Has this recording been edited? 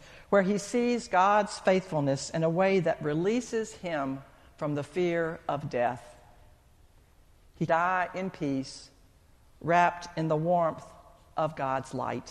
yes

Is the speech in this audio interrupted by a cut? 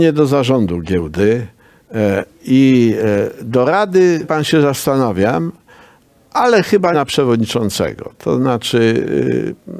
yes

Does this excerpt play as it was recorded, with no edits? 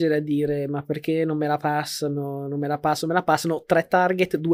yes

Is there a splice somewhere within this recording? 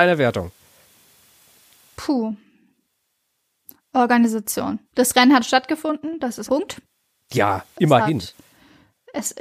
yes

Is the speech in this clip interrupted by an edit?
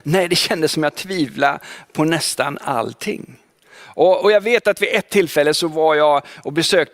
no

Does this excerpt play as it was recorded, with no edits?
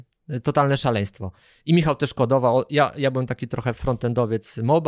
yes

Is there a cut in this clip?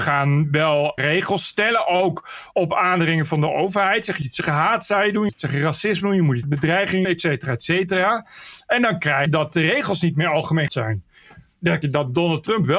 yes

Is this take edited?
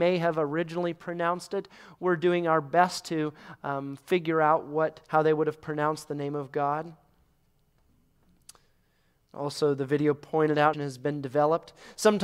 yes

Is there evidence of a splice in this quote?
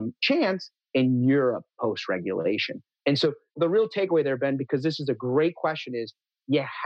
no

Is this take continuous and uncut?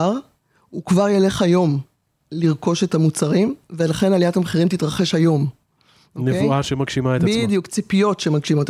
yes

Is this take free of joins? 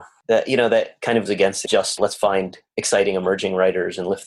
no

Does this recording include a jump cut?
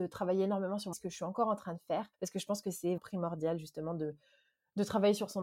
yes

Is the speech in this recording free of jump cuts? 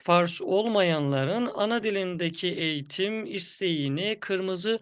yes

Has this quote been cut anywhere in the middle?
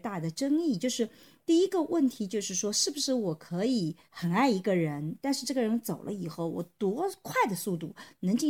yes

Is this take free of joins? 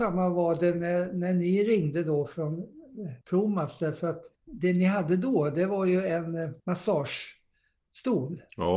no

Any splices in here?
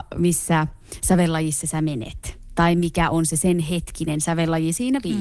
no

